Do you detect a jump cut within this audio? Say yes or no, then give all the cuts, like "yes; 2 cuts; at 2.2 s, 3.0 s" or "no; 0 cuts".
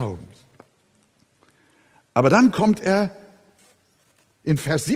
no; 0 cuts